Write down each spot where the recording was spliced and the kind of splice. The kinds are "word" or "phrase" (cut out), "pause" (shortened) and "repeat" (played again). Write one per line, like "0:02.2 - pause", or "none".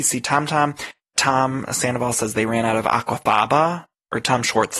0:01.2 - word

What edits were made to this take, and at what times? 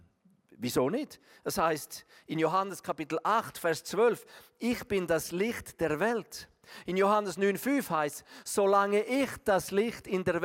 none

